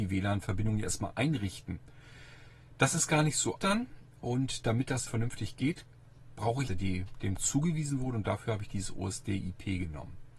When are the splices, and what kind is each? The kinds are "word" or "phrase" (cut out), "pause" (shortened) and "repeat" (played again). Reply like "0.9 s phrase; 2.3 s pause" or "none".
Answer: 3.6 s word; 5.1 s word; 6.7 s phrase; 7.4 s word